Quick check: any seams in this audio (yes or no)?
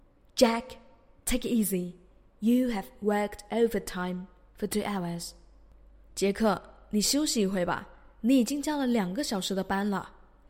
no